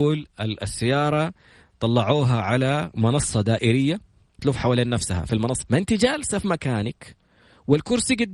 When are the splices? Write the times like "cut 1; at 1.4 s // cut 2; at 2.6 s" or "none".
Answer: cut 1; at 4.4 s // cut 2; at 5.6 s